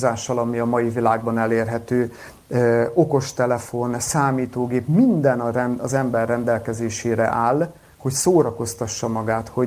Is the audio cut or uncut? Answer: uncut